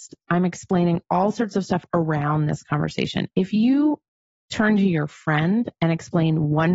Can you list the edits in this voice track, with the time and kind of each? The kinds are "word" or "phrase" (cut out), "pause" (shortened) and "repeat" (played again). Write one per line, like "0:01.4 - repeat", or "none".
none